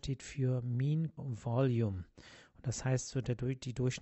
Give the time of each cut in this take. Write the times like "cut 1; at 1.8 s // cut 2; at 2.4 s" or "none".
cut 1; at 1.2 s

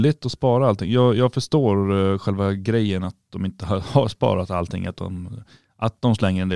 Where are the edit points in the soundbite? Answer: none

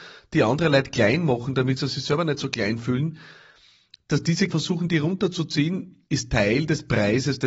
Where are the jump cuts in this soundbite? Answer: cut 1; at 4.5 s // cut 2; at 6.1 s

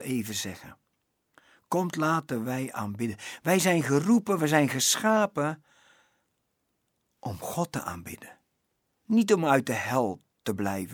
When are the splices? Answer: none

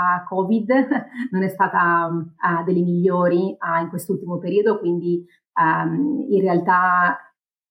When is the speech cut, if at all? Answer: none

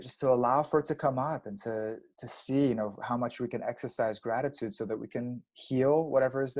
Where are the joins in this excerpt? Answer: none

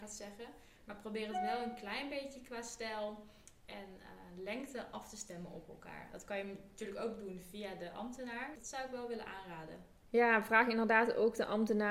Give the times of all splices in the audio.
none

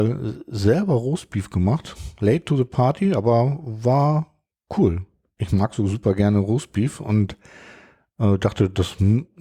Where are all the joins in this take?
none

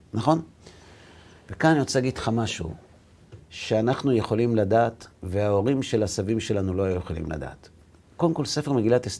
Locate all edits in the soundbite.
cut 1; at 3.4 s // cut 2; at 5.2 s

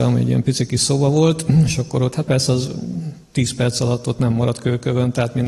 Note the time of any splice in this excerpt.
cut 1; at 3.2 s

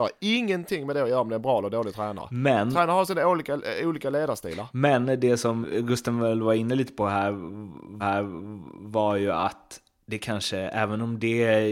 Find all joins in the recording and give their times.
cut 1; at 5.6 s // cut 2; at 8.0 s

